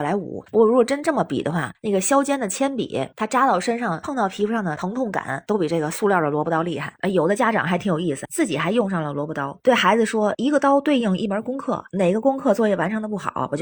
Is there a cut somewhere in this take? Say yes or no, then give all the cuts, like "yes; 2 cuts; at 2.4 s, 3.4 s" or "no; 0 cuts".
yes; 1 cut; at 3.1 s